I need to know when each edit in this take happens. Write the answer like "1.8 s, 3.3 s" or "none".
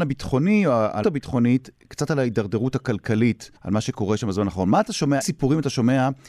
1.0 s, 3.6 s, 5.2 s